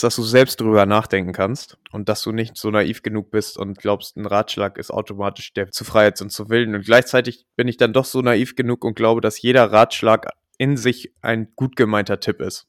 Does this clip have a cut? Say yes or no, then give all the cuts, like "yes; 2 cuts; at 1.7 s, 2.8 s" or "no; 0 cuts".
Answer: yes; 2 cuts; at 1.8 s, 5.7 s